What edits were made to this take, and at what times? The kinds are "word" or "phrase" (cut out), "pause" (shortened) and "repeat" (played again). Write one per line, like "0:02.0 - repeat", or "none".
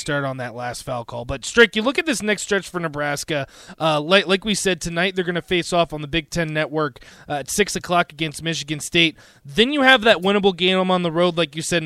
none